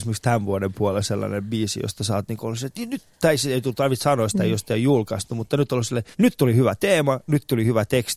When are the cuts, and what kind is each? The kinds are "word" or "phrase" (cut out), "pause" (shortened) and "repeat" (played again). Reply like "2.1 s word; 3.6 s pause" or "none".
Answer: 6.1 s pause